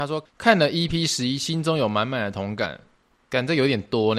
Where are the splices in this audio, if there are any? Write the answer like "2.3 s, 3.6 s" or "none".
none